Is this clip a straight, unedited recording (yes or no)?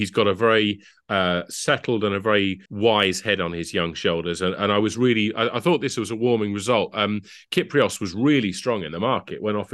no